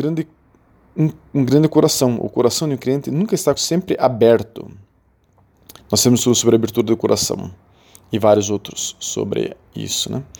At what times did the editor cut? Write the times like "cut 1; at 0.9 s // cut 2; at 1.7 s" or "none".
cut 1; at 3.6 s